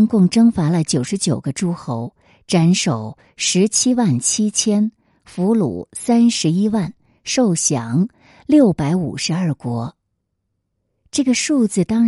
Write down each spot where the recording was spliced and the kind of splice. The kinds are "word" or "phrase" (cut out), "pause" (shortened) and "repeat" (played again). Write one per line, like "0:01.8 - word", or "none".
none